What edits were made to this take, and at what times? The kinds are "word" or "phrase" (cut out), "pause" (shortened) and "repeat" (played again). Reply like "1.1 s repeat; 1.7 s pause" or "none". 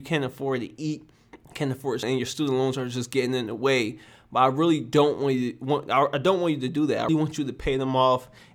1.4 s pause; 2.0 s phrase; 7.1 s word